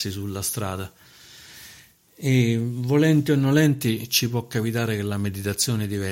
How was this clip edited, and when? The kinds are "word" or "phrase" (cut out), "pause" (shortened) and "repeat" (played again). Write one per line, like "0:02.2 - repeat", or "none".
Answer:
none